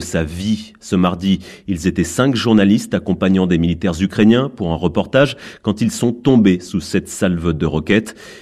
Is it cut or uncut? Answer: uncut